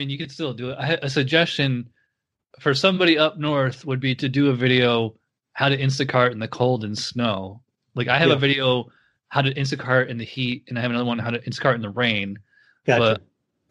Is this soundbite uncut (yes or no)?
yes